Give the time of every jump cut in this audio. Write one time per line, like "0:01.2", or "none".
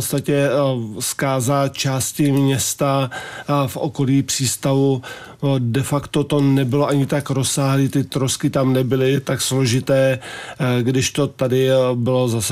none